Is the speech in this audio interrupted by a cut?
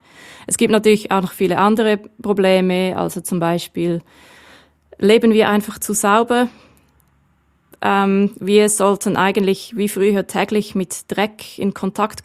no; 0 cuts

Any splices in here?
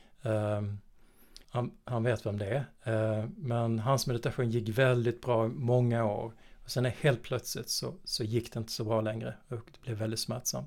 yes; 1 cut; at 1.4 s

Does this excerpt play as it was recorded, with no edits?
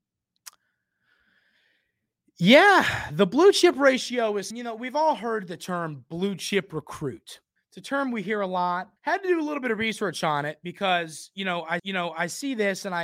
no; 4 cuts; at 4.5 s, 7.6 s, 9.0 s, 11.8 s

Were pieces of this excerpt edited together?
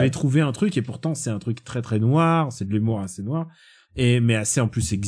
no; 0 cuts

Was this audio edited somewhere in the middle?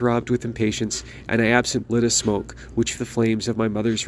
yes; 2 cuts; at 1.8 s, 2.9 s

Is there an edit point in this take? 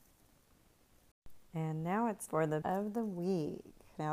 yes; 3 cuts; at 1.5 s, 2.3 s, 2.6 s

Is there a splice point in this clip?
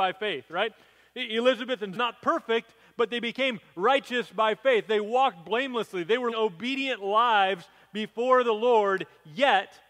yes; 2 cuts; at 2.0 s, 6.3 s

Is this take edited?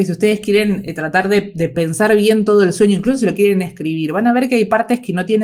no; 0 cuts

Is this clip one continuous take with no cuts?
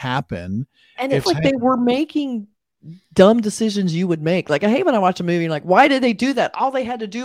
no; 1 cut; at 1.3 s

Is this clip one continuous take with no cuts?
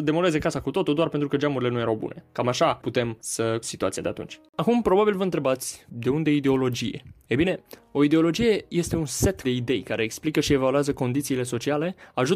no; 2 cuts; at 3.6 s, 9.4 s

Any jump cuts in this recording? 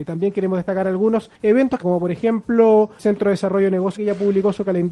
yes; 4 cuts; at 1.3 s, 1.8 s, 3.0 s, 4.0 s

